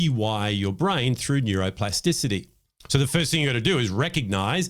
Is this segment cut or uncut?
uncut